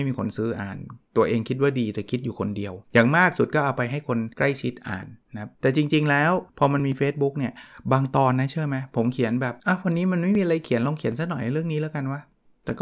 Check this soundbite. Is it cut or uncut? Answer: cut